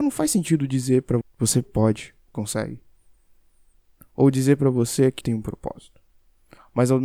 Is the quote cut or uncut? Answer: cut